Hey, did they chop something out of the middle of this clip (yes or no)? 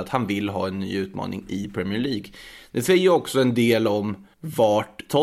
yes